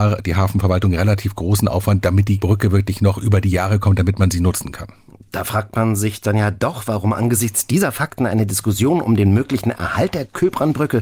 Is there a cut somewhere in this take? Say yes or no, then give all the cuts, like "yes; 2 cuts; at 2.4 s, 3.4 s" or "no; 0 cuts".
no; 0 cuts